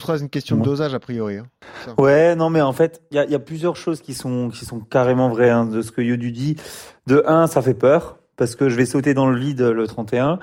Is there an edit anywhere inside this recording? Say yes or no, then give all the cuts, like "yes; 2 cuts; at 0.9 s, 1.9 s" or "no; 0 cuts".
no; 0 cuts